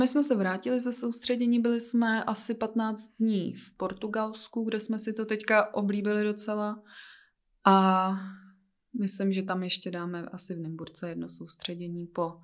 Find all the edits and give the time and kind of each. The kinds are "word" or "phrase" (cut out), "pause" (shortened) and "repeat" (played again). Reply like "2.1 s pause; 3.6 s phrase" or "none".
none